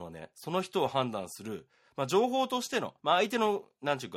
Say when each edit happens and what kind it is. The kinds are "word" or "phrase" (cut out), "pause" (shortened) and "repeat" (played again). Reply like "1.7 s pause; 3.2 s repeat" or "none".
3.0 s pause